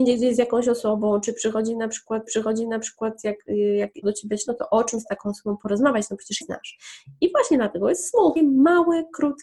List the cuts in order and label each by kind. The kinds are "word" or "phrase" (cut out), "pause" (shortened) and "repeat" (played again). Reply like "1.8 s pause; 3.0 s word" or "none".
2.3 s repeat; 4.0 s word; 4.5 s word; 6.4 s phrase; 8.4 s phrase